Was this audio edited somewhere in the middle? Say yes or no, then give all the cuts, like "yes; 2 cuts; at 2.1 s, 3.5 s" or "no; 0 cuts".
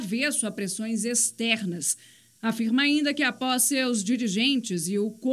no; 0 cuts